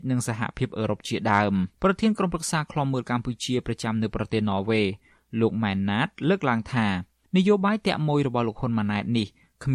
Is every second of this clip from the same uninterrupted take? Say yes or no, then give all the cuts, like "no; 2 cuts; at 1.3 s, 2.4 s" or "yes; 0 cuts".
no; 1 cut; at 1.7 s